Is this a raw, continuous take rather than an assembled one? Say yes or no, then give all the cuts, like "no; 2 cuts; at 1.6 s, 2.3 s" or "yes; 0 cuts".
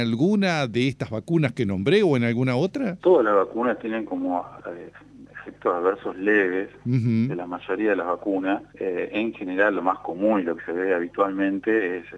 no; 2 cuts; at 3.0 s, 8.7 s